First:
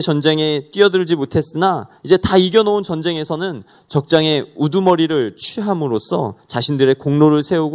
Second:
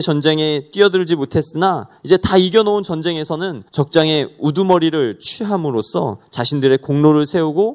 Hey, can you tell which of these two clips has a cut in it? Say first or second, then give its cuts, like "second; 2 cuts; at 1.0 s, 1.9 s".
second; 1 cut; at 3.7 s